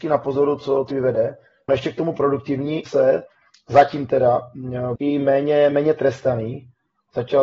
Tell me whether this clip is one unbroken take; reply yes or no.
no